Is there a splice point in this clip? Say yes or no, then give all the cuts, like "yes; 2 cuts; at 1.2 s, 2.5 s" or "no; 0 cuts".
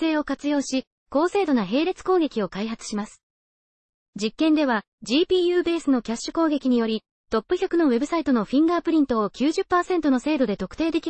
no; 0 cuts